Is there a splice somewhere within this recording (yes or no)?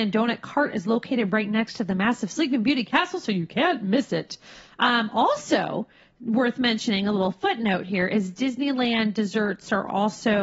no